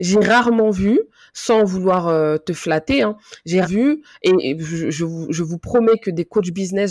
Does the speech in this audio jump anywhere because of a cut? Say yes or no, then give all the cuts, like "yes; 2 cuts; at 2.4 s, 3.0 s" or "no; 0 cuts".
yes; 1 cut; at 3.6 s